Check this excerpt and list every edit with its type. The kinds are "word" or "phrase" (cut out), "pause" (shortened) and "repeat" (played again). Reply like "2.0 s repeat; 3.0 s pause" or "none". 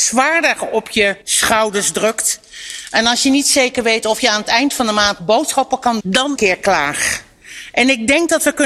1.2 s pause; 5.2 s word; 6.0 s word; 6.4 s phrase